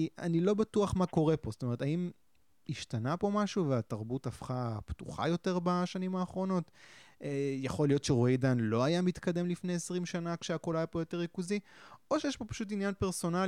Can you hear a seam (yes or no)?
no